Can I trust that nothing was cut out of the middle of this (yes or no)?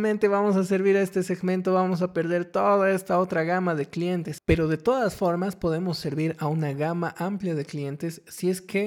yes